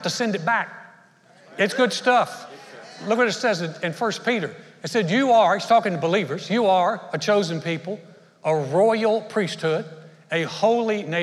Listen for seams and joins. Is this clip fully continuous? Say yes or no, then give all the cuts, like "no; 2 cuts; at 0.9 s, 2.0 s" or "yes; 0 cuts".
yes; 0 cuts